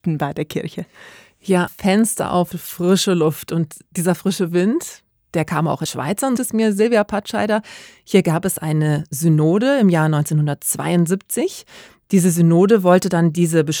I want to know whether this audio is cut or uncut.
cut